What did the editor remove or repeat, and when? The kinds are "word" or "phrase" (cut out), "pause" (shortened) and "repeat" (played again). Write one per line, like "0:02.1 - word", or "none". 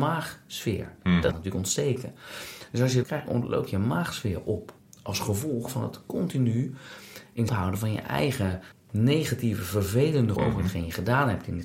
0:01.3 - word
0:03.0 - phrase
0:04.8 - pause
0:07.5 - word
0:08.7 - pause
0:10.4 - word